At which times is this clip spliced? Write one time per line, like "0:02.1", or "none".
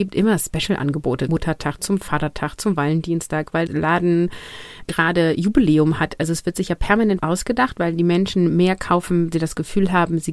0:01.3
0:03.7
0:04.8
0:07.2
0:09.3